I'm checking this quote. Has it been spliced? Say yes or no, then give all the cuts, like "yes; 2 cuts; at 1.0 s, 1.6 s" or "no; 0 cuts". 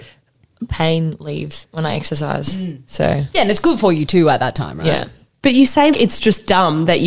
yes; 1 cut; at 5.9 s